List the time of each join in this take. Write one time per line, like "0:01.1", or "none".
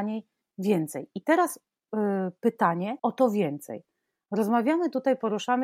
0:03.0